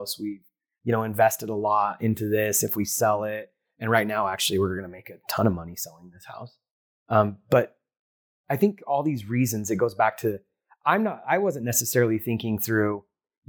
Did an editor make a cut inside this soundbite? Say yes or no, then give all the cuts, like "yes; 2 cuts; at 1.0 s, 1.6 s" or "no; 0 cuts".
no; 0 cuts